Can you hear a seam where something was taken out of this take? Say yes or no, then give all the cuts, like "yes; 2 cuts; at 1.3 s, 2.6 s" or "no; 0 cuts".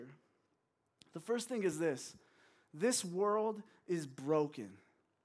no; 0 cuts